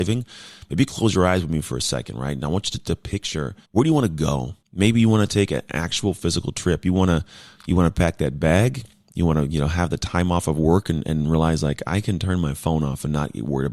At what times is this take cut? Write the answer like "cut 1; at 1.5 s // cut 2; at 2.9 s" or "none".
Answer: cut 1; at 3.6 s // cut 2; at 4.6 s